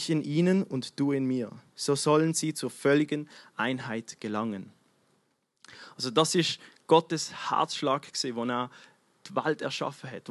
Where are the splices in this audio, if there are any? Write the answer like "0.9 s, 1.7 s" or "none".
none